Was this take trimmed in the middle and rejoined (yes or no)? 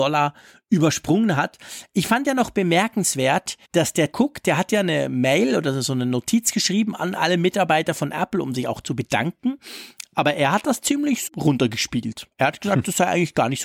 yes